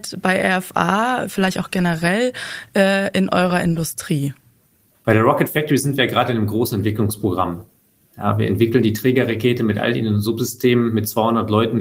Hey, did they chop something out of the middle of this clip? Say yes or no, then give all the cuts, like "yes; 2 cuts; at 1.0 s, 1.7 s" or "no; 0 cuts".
no; 0 cuts